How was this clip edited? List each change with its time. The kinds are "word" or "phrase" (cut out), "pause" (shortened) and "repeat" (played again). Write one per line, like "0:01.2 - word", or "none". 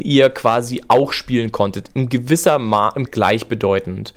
0:03.1 - phrase